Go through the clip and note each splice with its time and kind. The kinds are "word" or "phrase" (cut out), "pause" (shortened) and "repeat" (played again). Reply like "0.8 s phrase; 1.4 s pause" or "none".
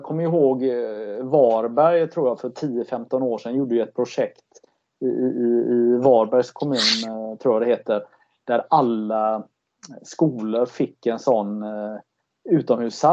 none

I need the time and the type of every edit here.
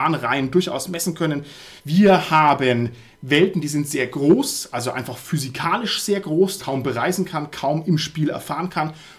1.8 s pause; 6.6 s phrase

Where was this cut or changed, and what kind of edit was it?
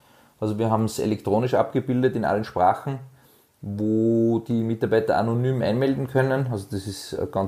none

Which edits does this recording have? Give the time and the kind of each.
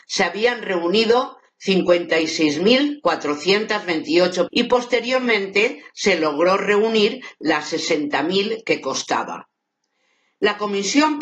4.5 s word

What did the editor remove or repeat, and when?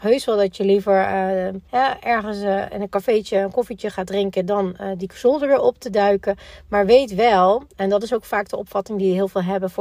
1.7 s pause

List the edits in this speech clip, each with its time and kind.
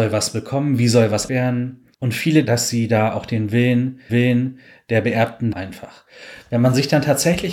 1.3 s word; 1.9 s pause; 2.5 s word; 4.1 s repeat; 5.5 s phrase

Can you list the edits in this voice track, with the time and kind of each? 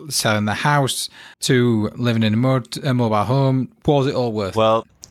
1.3 s pause

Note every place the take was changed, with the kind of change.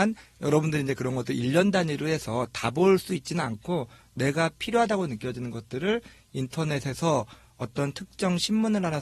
none

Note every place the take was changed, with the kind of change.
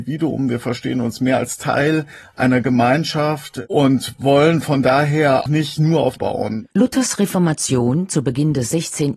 6.2 s phrase; 6.7 s pause

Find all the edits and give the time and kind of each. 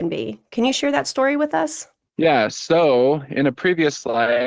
none

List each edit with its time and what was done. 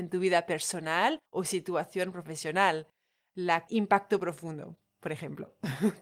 1.3 s pause; 3.7 s word

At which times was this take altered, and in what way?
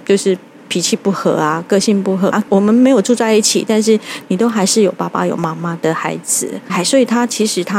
2.3 s word; 6.7 s word

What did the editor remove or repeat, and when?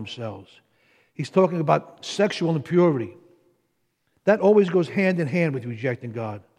none

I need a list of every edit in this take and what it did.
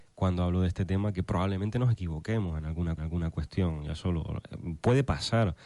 3.0 s repeat

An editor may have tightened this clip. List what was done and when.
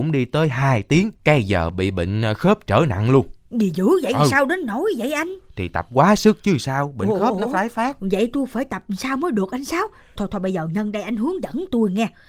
1.2 s pause; 10.2 s word

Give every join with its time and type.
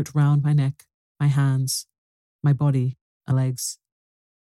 3.3 s word

